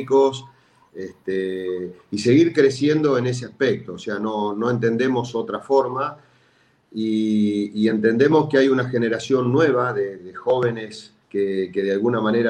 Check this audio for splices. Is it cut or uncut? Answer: cut